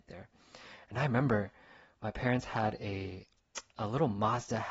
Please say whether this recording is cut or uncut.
uncut